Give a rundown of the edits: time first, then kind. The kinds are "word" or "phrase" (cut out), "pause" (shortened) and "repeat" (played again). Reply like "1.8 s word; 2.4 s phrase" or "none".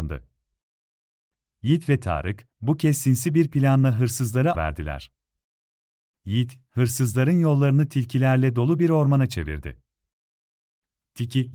4.5 s phrase